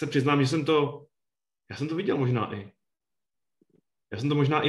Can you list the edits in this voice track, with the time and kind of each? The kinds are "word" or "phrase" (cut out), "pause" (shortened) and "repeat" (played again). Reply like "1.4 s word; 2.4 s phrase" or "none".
none